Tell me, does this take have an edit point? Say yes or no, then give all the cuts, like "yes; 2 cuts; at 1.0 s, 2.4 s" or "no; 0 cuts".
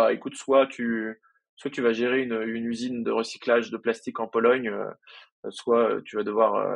no; 0 cuts